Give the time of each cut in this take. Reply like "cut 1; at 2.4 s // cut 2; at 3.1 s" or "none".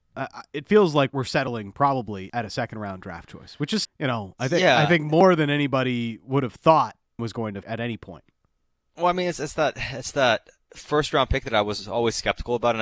cut 1; at 1.1 s // cut 2; at 2.3 s // cut 3; at 3.8 s // cut 4; at 7.2 s // cut 5; at 7.6 s